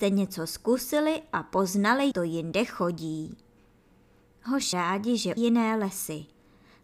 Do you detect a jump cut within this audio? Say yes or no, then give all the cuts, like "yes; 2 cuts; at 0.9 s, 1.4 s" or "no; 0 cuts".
yes; 3 cuts; at 2.1 s, 4.7 s, 5.4 s